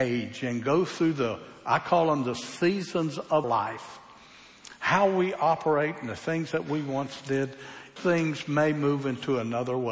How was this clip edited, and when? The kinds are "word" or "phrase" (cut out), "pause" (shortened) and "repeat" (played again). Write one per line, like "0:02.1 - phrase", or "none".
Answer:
0:03.4 - word
0:08.0 - word

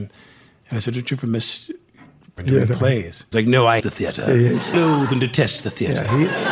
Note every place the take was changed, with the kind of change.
0:02.4 - word
0:03.3 - word
0:03.8 - word
0:04.7 - word

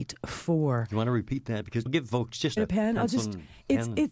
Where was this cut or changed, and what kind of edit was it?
0:01.9 - word
0:02.6 - phrase

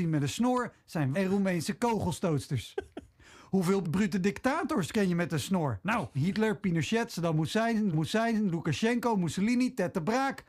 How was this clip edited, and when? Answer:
0:01.1 - word
0:03.8 - word
0:06.1 - word
0:06.6 - word
0:07.9 - repeat

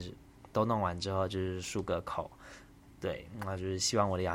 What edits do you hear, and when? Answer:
none

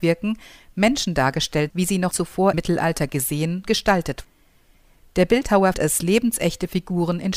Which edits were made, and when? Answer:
0:01.7 - word
0:02.1 - word
0:02.5 - word
0:03.6 - word
0:04.2 - word
0:05.7 - word

